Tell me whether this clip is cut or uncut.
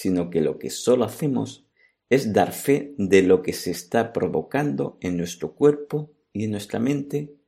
uncut